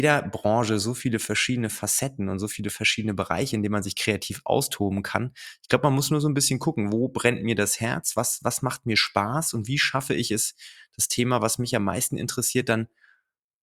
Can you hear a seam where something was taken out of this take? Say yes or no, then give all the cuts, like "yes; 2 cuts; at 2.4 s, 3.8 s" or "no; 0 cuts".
no; 0 cuts